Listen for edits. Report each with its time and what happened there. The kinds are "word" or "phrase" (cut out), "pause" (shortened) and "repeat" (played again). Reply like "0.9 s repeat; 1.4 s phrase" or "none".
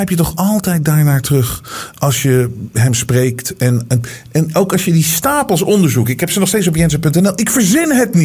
none